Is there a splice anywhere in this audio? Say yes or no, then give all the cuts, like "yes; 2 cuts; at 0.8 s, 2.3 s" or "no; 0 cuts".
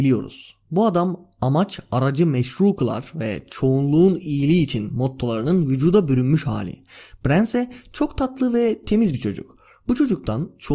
no; 0 cuts